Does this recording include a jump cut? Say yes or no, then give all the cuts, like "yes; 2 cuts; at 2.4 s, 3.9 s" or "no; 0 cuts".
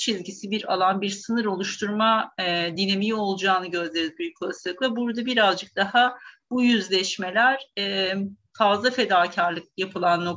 no; 0 cuts